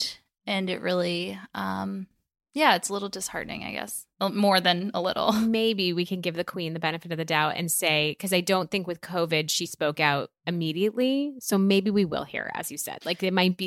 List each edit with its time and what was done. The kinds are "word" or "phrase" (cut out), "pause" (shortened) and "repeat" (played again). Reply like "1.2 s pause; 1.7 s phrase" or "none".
none